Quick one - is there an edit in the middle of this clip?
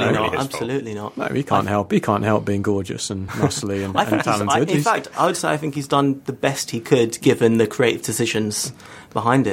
no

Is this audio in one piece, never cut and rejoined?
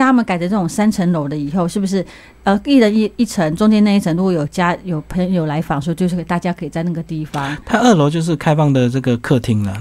yes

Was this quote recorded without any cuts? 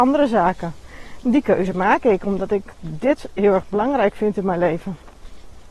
yes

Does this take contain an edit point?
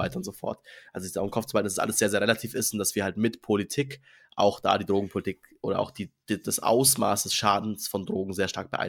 no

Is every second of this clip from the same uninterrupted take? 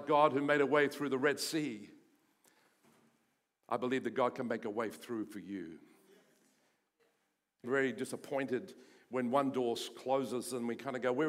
no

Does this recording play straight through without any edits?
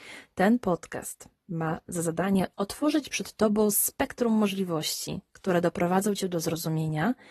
yes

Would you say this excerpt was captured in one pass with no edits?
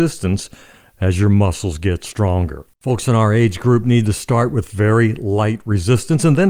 no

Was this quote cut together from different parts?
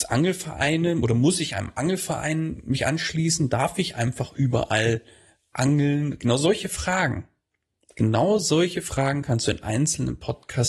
no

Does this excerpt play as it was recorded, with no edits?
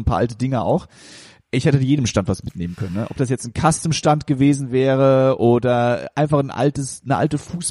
yes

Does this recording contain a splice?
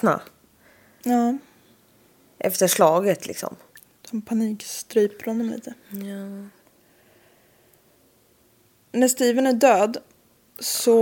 yes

